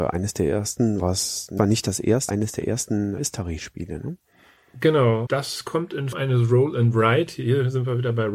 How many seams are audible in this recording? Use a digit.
6